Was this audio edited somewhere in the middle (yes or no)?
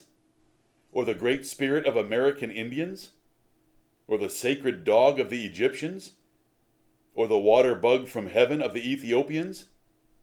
no